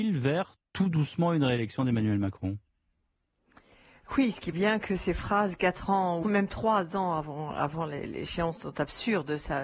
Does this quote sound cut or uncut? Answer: cut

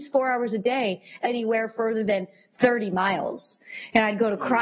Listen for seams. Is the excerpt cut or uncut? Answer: cut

